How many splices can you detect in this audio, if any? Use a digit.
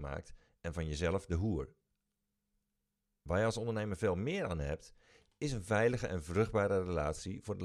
0